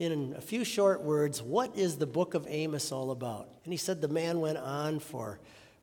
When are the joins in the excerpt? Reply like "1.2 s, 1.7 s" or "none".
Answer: 3.6 s